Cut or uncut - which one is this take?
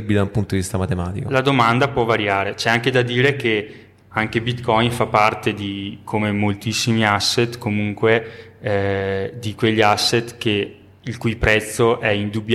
uncut